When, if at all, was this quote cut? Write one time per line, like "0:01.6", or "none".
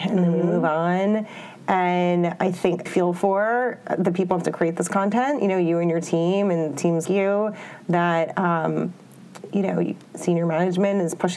0:02.9
0:07.1
0:10.1